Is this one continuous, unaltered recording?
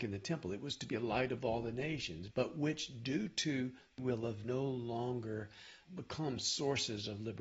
no; 4 cuts; at 2.3 s, 4.0 s, 4.4 s, 5.9 s

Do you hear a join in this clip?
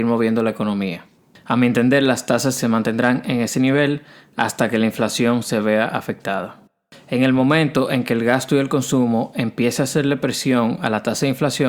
yes; 1 cut; at 2.6 s

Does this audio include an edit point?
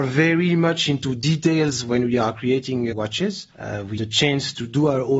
yes; 3 cuts; at 2.9 s, 3.5 s, 4.0 s

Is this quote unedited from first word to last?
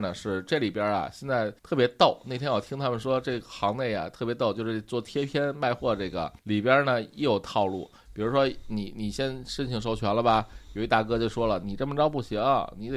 no; 2 cuts; at 1.6 s, 6.4 s

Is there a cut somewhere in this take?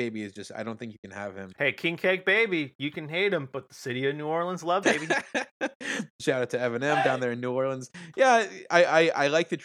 yes; 1 cut; at 4.8 s

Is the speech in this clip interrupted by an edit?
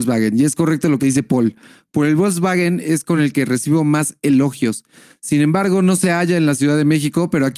no; 0 cuts

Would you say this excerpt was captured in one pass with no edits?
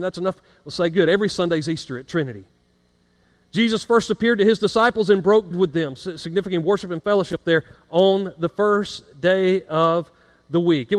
no; 1 cut; at 5.5 s

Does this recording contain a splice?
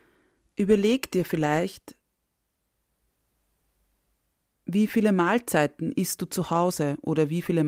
no; 0 cuts

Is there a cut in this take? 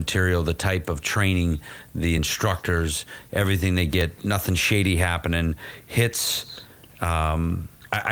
no; 0 cuts

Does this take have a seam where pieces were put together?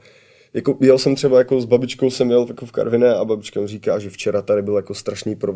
no; 0 cuts

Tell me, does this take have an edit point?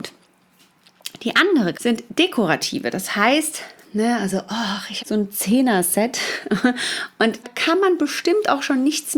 yes; 3 cuts; at 1.7 s, 5.0 s, 7.4 s

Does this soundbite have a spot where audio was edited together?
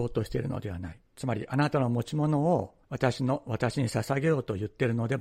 yes; 1 cut; at 2.8 s

